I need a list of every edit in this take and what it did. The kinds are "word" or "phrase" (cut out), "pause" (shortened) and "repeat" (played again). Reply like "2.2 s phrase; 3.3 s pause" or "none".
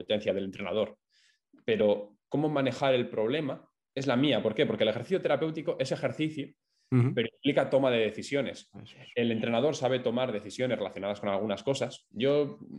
none